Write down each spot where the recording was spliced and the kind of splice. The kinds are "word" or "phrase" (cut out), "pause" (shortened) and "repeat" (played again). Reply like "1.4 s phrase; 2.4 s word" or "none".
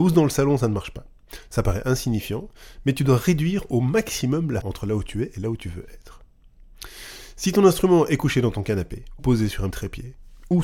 4.6 s word; 9.2 s word; 9.7 s word

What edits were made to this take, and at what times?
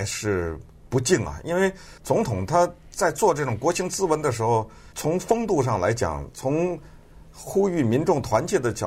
2.0 s pause; 4.9 s pause

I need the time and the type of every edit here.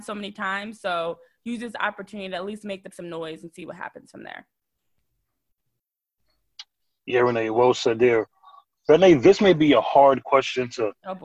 2.9 s phrase

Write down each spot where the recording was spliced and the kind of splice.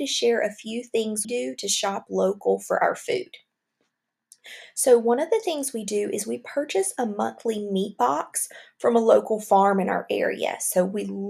1.2 s word

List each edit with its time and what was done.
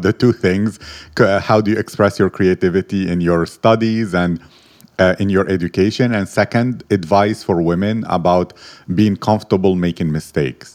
none

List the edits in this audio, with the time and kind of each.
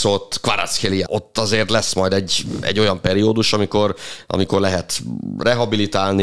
1.1 s phrase

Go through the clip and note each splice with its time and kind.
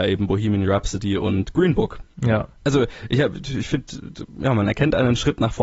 none

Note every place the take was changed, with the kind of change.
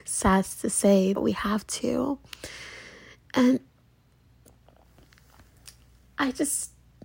1.1 s word

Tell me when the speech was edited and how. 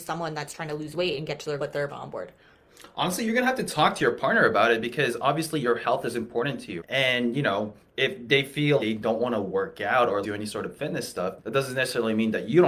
1.6 s word; 1.9 s word; 6.8 s word; 8.8 s word; 10.2 s word; 11.4 s word

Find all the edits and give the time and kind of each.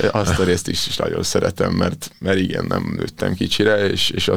none

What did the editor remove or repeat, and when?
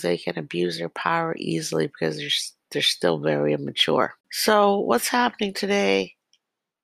4.2 s pause

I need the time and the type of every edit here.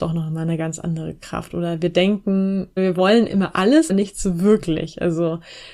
2.8 s word; 3.3 s word; 3.9 s word

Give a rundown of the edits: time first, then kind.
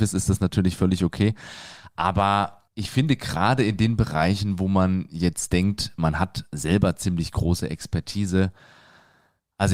2.7 s pause

